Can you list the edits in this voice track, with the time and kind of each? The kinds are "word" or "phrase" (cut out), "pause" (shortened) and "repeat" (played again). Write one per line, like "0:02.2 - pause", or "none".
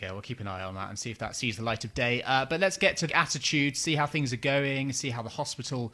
0:03.1 - phrase